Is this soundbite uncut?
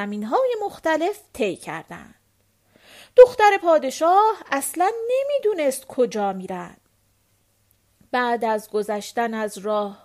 yes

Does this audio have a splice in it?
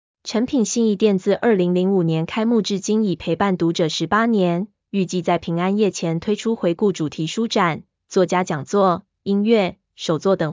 no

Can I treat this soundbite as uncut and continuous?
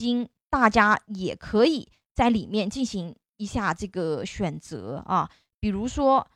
yes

